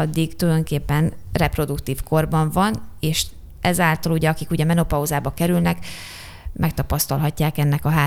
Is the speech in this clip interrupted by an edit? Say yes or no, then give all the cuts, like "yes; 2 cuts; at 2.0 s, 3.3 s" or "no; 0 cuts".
no; 0 cuts